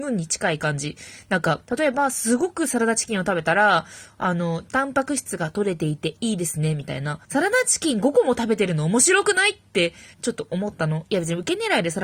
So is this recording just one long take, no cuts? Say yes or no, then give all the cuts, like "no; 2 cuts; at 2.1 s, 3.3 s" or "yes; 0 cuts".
no; 3 cuts; at 1.6 s, 7.2 s, 10.1 s